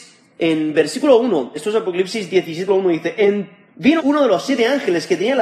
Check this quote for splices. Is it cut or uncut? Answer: cut